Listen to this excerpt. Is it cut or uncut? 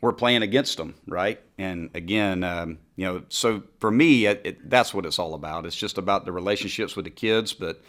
uncut